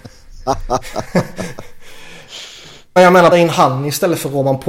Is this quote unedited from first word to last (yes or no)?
no